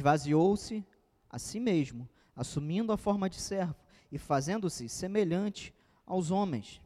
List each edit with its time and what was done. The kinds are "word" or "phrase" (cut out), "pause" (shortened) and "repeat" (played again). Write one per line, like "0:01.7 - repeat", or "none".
none